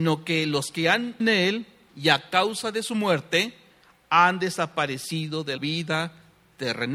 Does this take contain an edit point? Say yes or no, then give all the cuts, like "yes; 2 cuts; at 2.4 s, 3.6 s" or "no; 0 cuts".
yes; 2 cuts; at 1.2 s, 5.6 s